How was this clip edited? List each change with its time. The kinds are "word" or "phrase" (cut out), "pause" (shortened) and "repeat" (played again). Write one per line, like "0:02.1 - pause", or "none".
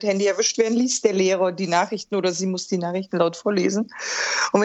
none